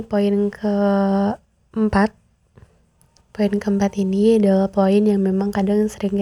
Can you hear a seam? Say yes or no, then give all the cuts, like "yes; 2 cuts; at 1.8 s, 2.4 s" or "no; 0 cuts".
no; 0 cuts